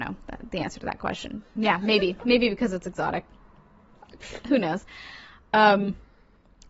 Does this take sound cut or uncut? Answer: uncut